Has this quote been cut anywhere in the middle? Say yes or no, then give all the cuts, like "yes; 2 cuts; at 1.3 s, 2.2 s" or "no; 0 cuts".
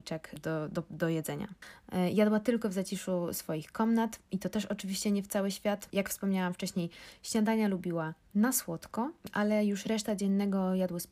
no; 0 cuts